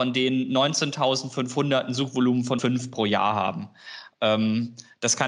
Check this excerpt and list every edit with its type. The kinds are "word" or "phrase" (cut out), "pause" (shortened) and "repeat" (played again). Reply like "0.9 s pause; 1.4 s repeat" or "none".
2.6 s word